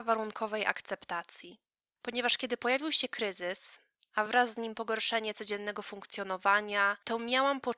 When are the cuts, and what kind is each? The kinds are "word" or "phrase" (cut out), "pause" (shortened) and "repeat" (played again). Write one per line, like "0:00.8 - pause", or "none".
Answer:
none

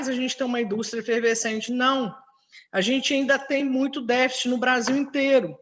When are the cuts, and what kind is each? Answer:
none

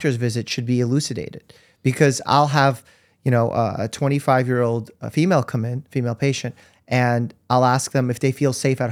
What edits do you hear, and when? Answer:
none

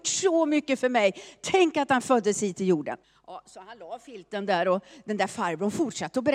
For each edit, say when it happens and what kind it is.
0:03.0 - pause

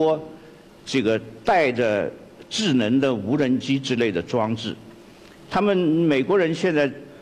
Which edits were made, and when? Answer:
none

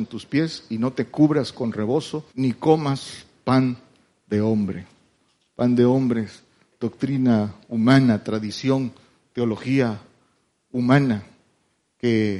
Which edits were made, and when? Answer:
0:02.3 - pause

